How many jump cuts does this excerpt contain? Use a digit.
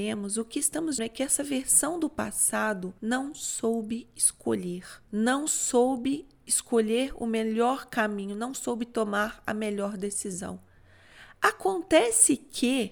3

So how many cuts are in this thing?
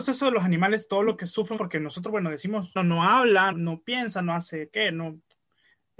3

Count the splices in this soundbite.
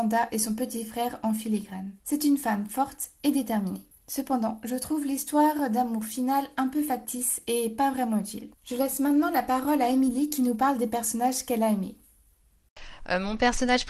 3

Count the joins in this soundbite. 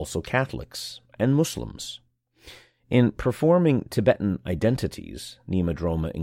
0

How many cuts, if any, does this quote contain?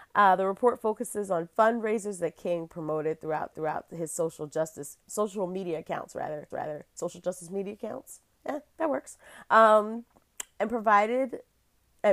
4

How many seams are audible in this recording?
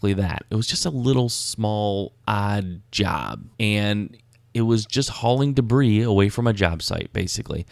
1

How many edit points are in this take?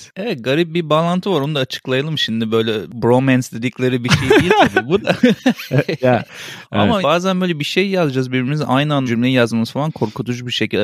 2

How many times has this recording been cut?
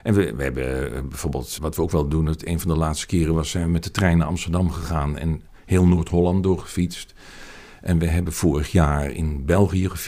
1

